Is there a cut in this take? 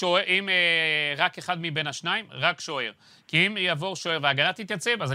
no; 0 cuts

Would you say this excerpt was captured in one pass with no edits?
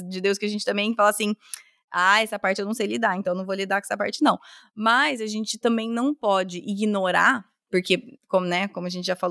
yes; 0 cuts

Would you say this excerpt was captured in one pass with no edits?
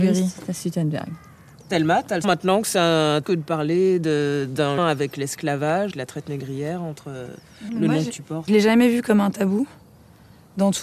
no; 6 cuts; at 2.2 s, 3.2 s, 4.8 s, 5.9 s, 7.7 s, 8.5 s

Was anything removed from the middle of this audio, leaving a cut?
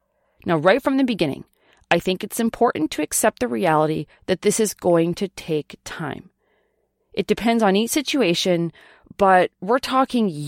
no; 0 cuts

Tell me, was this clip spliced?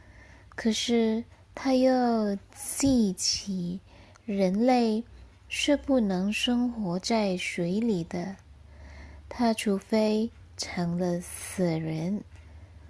no; 0 cuts

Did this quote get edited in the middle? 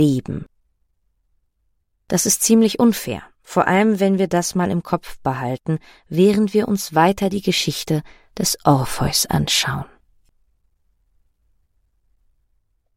no; 0 cuts

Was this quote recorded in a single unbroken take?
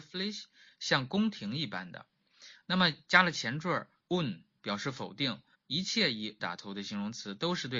no; 3 cuts; at 4.6 s, 5.5 s, 6.4 s

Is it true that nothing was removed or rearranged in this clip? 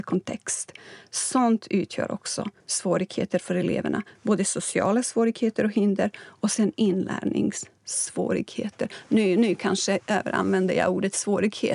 no; 1 cut; at 2.6 s

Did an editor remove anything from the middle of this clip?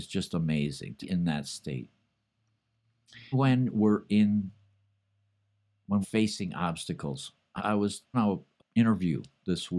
yes; 6 cuts; at 1.0 s, 3.3 s, 6.0 s, 7.6 s, 8.1 s, 8.6 s

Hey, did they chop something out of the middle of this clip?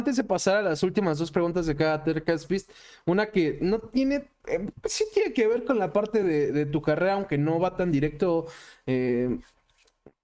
no; 0 cuts

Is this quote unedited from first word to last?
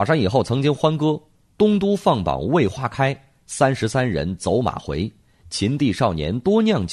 yes; 0 cuts

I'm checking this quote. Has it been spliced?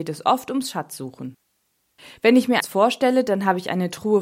yes; 1 cut; at 2.6 s

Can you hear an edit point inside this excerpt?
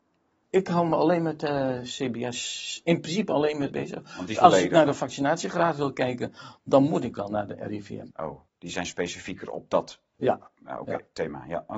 yes; 3 cuts; at 3.7 s, 4.3 s, 8.5 s

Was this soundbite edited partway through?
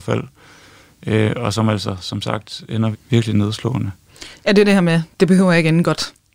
yes; 1 cut; at 2.9 s

